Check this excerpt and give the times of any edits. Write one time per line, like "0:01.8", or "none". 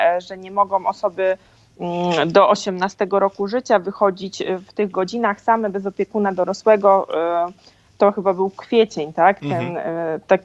none